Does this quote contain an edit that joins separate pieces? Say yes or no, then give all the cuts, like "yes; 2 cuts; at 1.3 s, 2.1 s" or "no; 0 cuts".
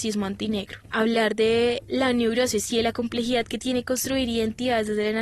no; 0 cuts